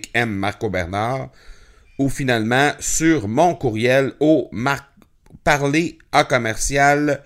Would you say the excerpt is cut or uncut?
uncut